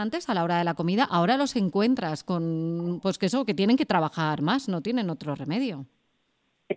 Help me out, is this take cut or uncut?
uncut